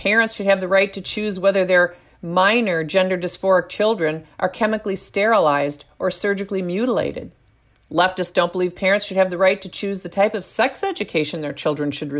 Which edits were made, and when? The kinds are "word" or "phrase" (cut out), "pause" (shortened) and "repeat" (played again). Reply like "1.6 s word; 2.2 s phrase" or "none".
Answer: none

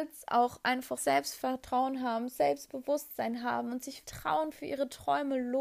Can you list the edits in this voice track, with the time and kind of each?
1.0 s phrase; 4.0 s word

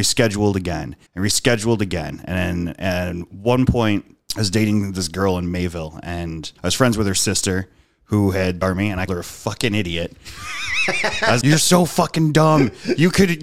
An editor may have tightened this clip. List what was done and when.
1.1 s pause; 4.2 s pause; 6.6 s pause; 8.6 s phrase; 9.1 s word; 11.4 s word

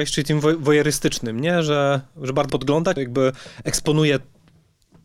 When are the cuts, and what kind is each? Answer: 2.5 s word; 3.0 s phrase

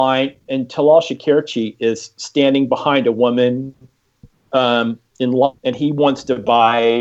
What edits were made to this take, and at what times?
5.1 s pause; 5.6 s pause

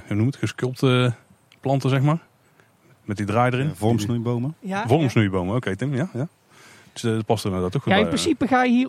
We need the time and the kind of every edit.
none

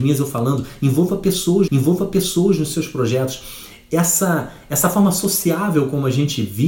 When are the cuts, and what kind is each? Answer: 1.7 s repeat

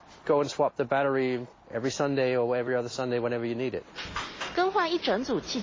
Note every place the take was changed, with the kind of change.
none

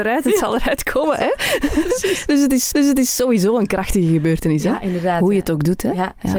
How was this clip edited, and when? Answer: 2.7 s repeat

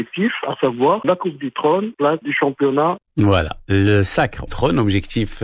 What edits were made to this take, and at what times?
1.0 s word; 1.9 s phrase; 3.1 s pause; 4.5 s phrase

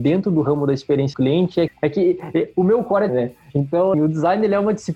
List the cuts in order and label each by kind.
1.1 s word; 1.7 s word; 3.1 s word; 3.9 s word

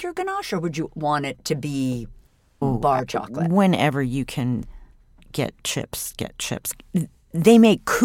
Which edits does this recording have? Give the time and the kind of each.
none

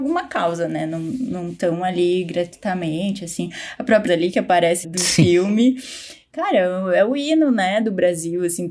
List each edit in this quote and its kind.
4.1 s word; 4.8 s phrase

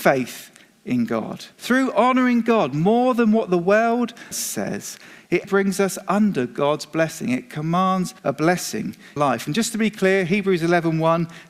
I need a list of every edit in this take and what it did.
1.5 s pause; 4.3 s phrase; 5.4 s word; 8.2 s pause; 9.2 s phrase

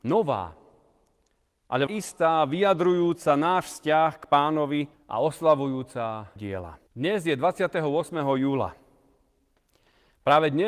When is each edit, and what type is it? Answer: 1.9 s phrase; 4.9 s pause; 6.4 s word; 6.9 s pause

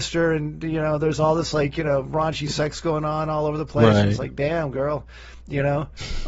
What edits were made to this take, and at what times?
none

